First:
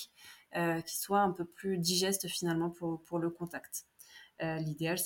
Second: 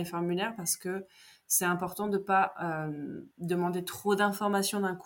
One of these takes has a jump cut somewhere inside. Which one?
second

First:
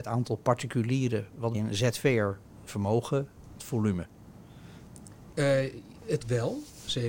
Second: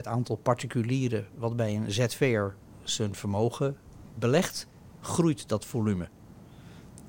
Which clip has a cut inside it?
first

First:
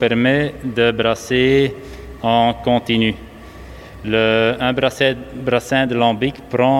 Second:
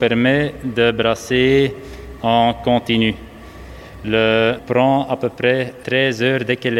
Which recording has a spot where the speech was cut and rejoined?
second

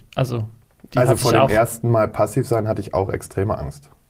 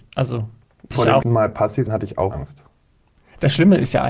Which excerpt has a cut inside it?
second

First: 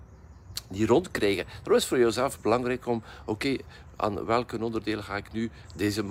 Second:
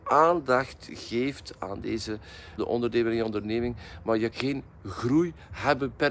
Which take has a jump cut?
second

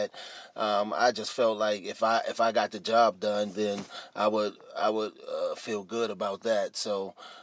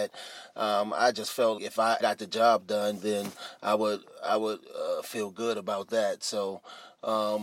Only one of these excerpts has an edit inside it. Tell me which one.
second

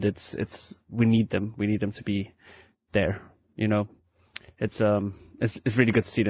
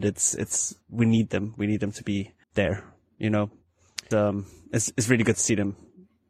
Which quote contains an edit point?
second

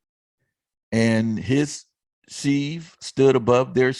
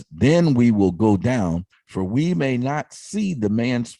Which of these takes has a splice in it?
second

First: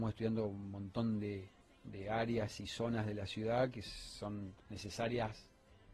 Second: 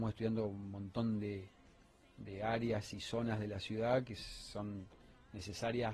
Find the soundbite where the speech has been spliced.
first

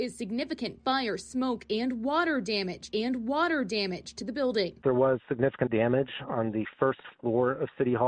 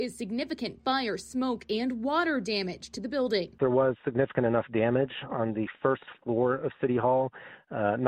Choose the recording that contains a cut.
first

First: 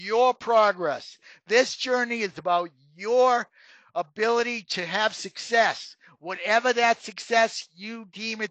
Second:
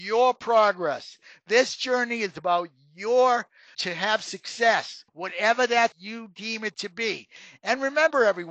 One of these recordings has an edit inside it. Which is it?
second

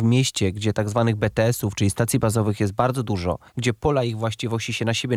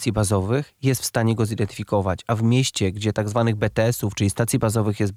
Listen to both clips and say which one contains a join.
first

